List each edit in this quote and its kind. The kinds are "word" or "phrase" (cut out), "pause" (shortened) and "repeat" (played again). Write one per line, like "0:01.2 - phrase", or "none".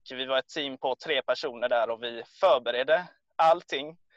none